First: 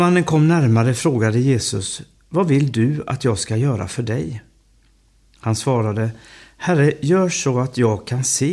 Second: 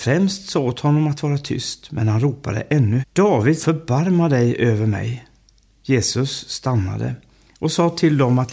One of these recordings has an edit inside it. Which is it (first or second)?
second